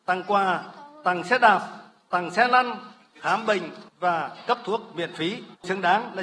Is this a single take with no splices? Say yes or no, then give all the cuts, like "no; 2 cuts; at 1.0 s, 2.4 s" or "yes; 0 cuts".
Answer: yes; 0 cuts